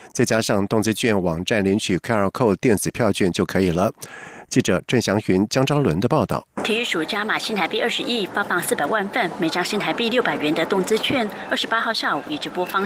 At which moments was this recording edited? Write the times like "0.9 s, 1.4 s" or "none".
6.5 s